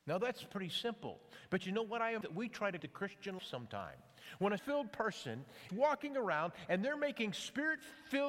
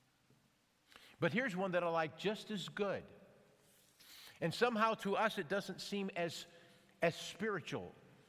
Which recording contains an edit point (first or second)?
first